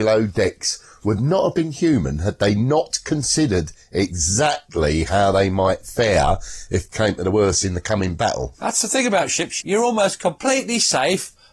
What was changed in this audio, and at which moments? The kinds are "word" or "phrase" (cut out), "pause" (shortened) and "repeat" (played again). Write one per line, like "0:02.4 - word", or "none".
0:06.9 - word
0:09.6 - word